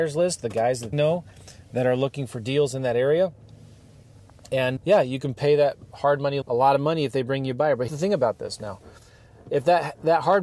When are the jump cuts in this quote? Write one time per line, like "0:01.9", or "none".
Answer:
0:00.9
0:04.8
0:06.4
0:07.9